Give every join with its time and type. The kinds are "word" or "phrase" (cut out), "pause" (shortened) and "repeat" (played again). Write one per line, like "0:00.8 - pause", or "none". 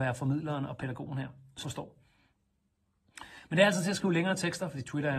0:01.6 - word